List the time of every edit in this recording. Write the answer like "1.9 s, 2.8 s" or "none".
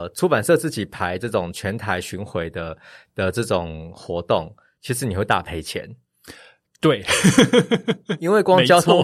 none